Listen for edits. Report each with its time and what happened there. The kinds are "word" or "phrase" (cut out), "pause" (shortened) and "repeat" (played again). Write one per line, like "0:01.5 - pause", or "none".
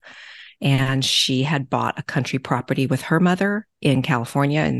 none